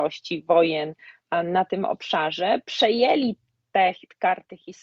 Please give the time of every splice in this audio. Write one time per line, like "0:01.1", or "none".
none